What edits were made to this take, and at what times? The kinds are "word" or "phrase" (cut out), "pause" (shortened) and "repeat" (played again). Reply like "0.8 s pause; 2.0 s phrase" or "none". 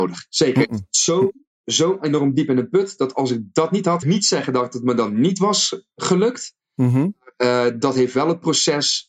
4.0 s phrase